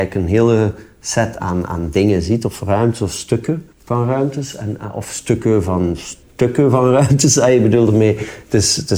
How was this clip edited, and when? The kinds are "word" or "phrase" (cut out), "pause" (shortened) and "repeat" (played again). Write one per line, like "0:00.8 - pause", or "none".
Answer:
0:01.4 - word
0:03.7 - pause
0:06.2 - pause